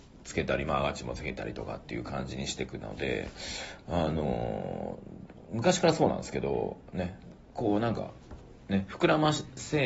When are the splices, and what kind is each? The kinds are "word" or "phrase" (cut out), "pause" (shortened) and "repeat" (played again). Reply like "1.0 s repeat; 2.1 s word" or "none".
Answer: 7.4 s pause; 8.6 s pause